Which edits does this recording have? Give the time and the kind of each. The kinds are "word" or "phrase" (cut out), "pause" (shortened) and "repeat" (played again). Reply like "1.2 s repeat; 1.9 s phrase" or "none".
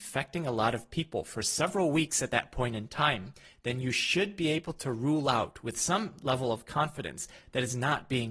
none